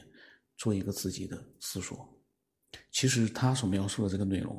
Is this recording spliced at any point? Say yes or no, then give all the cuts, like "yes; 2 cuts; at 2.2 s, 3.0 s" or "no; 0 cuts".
yes; 1 cut; at 1.5 s